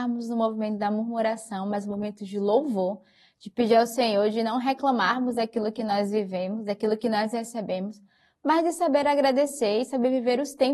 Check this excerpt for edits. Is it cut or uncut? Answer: uncut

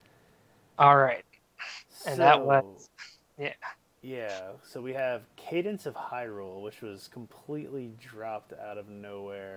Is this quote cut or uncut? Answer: uncut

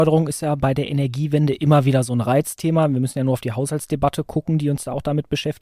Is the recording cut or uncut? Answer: uncut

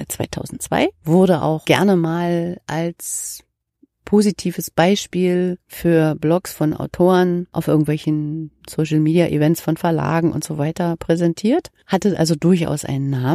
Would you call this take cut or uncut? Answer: uncut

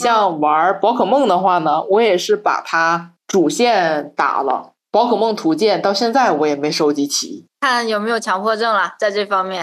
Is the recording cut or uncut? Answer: uncut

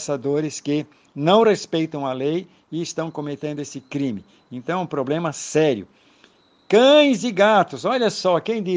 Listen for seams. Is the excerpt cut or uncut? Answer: uncut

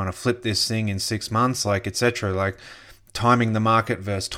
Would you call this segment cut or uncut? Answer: uncut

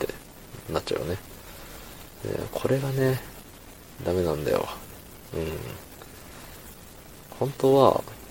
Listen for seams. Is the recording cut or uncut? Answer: cut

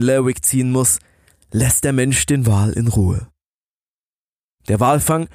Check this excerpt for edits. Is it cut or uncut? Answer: uncut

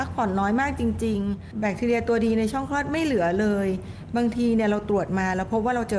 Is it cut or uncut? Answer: cut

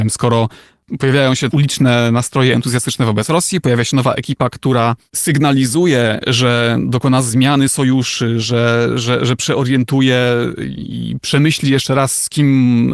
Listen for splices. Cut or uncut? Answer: uncut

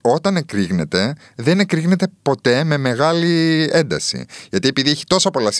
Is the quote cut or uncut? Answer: uncut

